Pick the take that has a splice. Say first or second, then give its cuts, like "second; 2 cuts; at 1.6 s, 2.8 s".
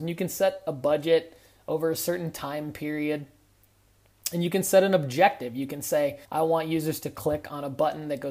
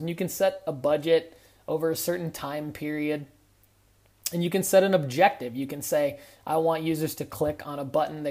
first; 1 cut; at 6.2 s